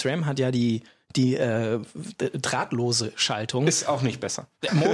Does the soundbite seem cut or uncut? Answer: uncut